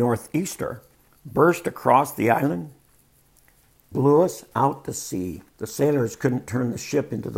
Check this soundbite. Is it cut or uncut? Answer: cut